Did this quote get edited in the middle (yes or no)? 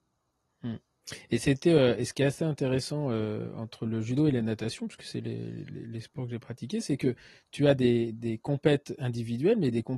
no